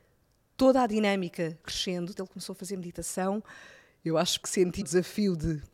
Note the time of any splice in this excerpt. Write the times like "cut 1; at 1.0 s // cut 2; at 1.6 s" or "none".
cut 1; at 1.6 s // cut 2; at 2.2 s // cut 3; at 4.4 s // cut 4; at 4.8 s

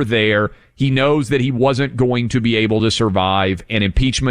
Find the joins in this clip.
none

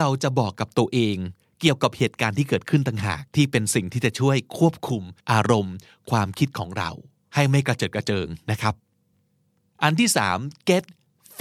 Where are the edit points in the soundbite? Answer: cut 1; at 3.3 s // cut 2; at 5.2 s

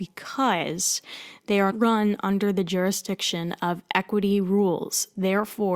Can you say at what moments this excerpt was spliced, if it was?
cut 1; at 1.7 s

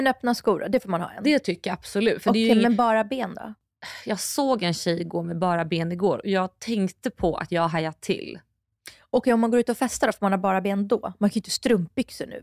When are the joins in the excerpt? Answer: none

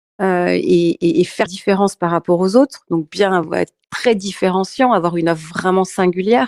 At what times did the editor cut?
cut 1; at 1.5 s

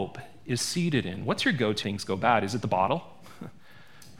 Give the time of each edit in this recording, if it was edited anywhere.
cut 1; at 1.8 s

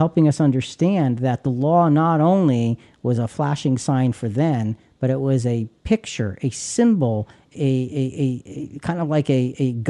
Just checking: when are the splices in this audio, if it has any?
cut 1; at 7.5 s

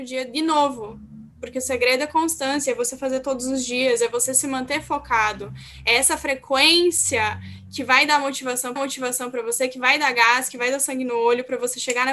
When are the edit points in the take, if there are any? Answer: cut 1; at 1.3 s // cut 2; at 8.8 s

